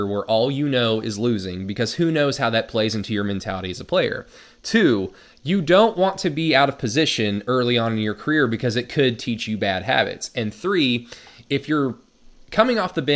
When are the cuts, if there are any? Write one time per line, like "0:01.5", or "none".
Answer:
none